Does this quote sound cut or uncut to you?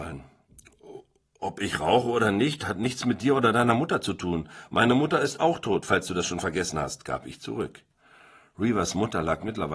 uncut